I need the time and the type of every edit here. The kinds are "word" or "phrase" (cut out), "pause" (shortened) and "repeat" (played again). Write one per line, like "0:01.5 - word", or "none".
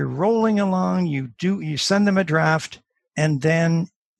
none